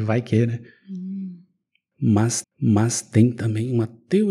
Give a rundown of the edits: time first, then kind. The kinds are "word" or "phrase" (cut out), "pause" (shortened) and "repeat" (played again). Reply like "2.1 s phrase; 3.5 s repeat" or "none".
2.4 s repeat